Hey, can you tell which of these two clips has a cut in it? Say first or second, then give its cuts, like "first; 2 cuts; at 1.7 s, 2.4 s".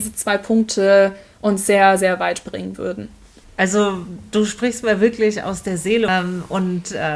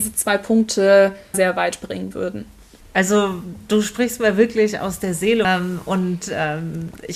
second; 1 cut; at 1.3 s